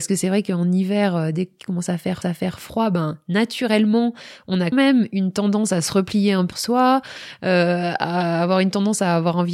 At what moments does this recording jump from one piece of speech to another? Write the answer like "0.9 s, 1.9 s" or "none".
2.2 s, 4.7 s, 6.5 s